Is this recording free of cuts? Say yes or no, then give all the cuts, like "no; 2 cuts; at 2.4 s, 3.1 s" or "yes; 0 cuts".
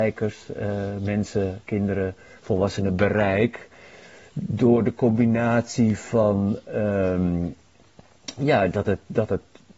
yes; 0 cuts